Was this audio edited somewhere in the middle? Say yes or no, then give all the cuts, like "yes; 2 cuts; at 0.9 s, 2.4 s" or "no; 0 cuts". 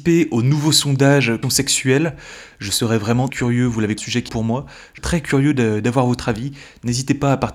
yes; 5 cuts; at 1.4 s, 3.3 s, 4.0 s, 4.3 s, 5.0 s